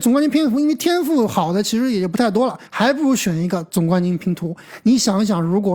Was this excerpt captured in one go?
no; 1 cut; at 2.7 s

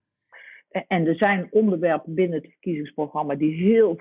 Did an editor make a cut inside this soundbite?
no; 0 cuts

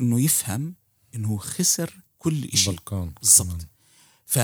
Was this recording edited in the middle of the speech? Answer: yes; 1 cut; at 2.1 s

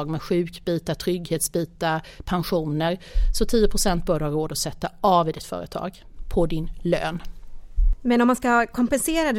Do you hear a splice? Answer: no; 0 cuts

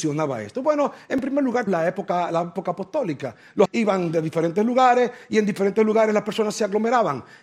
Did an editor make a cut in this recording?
yes; 2 cuts; at 1.7 s, 3.6 s

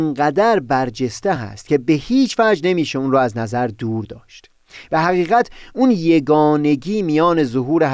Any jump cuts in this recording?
no; 0 cuts

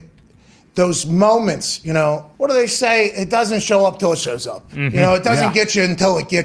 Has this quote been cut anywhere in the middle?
yes; 1 cut; at 2.3 s

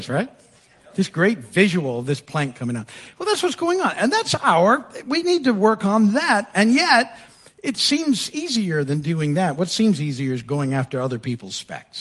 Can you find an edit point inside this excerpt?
no; 0 cuts

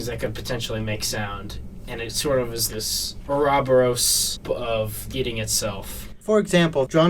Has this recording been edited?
yes; 3 cuts; at 2.7 s, 4.4 s, 5.1 s

